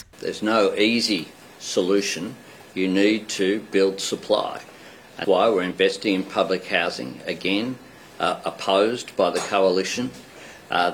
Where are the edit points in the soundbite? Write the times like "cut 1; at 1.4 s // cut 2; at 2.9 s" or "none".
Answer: cut 1; at 5.2 s